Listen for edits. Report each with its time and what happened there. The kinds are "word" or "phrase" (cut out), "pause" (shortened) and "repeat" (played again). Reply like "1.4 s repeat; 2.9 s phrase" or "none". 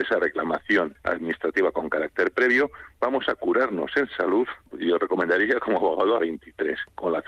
6.2 s phrase